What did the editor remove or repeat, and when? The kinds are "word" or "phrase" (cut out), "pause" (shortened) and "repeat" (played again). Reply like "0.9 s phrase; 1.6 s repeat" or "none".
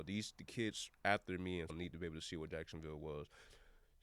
1.7 s word

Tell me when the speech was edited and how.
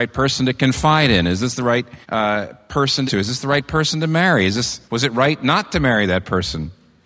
2.0 s pause; 3.1 s phrase; 4.9 s pause

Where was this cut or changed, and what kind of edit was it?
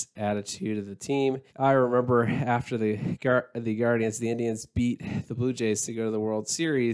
1.5 s pause

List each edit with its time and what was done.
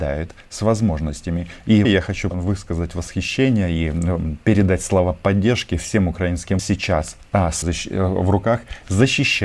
1.8 s word; 2.3 s word; 6.6 s phrase; 7.6 s word

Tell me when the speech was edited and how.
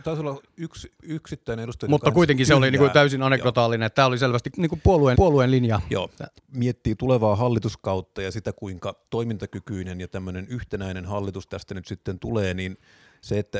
4.5 s word; 5.1 s repeat; 9.1 s pause

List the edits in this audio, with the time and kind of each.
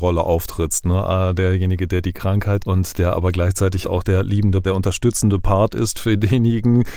2.6 s word; 3.8 s word; 4.6 s word

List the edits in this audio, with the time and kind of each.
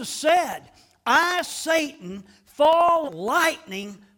1.4 s word; 3.1 s word

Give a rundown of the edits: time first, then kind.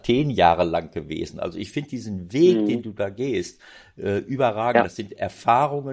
none

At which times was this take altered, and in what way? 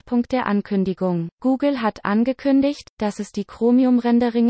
1.3 s pause

